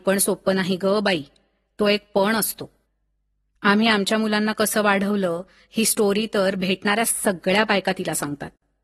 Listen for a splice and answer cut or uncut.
uncut